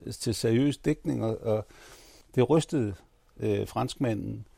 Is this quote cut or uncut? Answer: uncut